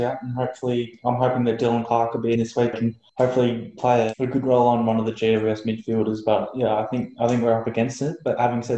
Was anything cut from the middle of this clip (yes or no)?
yes